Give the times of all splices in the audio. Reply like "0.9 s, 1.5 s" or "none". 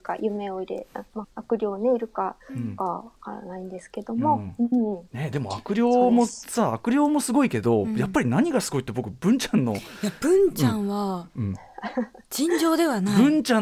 1.2 s, 5.1 s